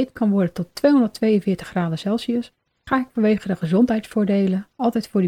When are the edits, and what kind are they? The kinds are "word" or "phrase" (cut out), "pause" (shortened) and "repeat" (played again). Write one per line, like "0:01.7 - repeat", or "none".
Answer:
none